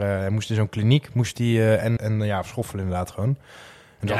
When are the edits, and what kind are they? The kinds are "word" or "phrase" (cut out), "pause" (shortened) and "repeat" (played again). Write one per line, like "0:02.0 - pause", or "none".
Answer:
0:02.0 - word